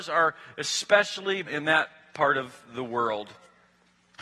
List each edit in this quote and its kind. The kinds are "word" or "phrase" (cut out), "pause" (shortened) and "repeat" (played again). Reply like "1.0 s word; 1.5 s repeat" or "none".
1.4 s word